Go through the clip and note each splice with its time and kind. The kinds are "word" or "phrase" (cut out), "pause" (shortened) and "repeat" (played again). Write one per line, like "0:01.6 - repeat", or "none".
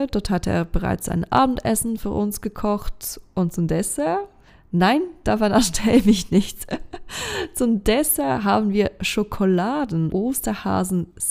none